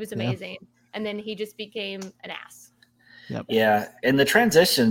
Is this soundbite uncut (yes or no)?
yes